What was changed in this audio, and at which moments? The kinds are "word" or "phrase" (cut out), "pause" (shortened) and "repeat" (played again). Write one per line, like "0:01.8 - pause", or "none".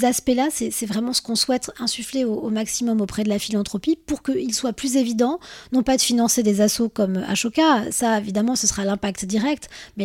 none